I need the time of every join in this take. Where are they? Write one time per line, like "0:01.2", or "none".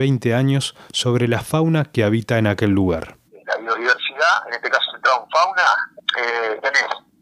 0:03.3